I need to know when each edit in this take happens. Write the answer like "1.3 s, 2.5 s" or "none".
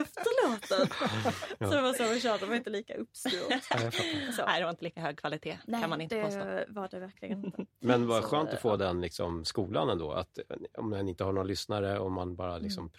none